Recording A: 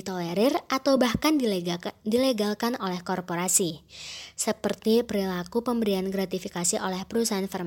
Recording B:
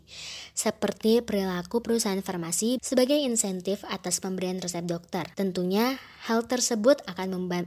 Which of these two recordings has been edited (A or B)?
B